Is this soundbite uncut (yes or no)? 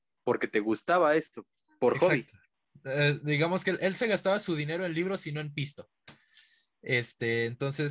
yes